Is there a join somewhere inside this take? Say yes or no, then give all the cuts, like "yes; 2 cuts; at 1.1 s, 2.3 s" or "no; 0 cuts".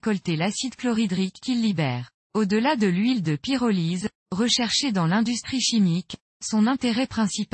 yes; 1 cut; at 2.2 s